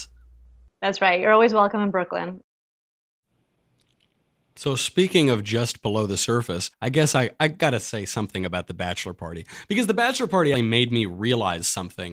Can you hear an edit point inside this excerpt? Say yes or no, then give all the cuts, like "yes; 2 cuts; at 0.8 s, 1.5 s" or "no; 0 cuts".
yes; 2 cuts; at 6.7 s, 10.5 s